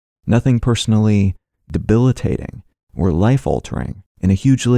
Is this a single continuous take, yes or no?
yes